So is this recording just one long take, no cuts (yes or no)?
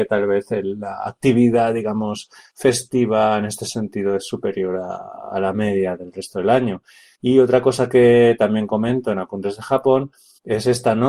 yes